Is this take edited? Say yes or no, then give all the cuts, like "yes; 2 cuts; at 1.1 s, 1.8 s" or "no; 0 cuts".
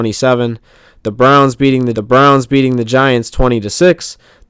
yes; 1 cut; at 2.0 s